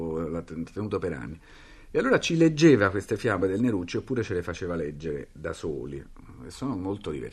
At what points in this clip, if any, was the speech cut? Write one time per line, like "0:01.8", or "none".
none